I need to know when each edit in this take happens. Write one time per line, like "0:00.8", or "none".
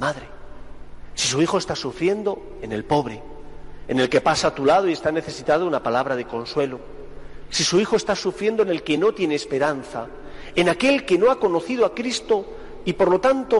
none